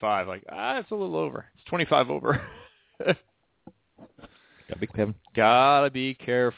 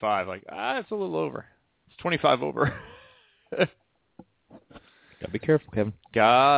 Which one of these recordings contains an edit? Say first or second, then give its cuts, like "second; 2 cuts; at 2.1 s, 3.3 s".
first; 3 cuts; at 1.5 s, 2.7 s, 4.9 s